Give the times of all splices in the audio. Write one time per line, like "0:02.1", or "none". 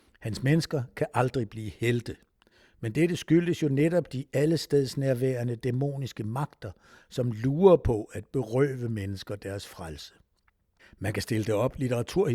none